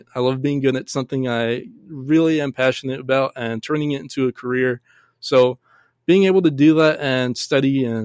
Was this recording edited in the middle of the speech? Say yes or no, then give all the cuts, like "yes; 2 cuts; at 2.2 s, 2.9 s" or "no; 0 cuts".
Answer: no; 0 cuts